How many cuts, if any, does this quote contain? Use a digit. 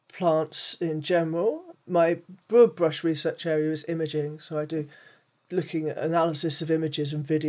1